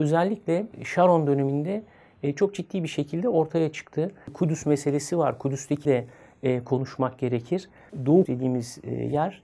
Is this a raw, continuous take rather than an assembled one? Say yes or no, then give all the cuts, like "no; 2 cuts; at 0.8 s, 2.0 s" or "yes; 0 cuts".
no; 2 cuts; at 5.8 s, 8.2 s